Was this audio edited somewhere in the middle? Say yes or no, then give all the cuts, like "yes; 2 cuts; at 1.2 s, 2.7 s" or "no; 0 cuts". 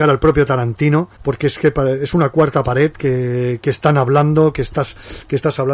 yes; 1 cut; at 1.2 s